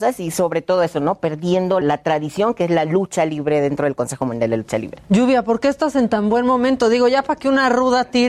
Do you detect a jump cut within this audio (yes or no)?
yes